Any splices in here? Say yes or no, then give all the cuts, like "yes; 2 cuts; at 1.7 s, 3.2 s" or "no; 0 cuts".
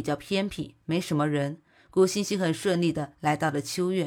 no; 0 cuts